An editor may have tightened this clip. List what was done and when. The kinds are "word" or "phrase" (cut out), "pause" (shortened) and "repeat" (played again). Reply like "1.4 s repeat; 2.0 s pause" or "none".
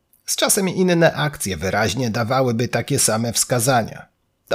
none